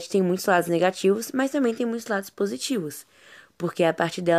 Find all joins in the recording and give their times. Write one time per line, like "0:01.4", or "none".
none